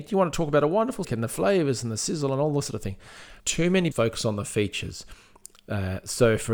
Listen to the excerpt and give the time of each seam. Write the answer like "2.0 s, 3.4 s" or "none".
1.0 s, 3.4 s, 3.9 s